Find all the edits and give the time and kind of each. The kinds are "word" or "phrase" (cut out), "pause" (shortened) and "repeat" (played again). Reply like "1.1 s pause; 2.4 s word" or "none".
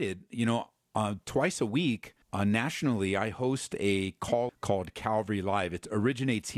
2.2 s pause; 4.5 s phrase